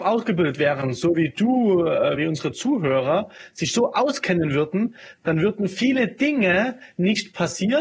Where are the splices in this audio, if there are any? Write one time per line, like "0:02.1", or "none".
0:02.2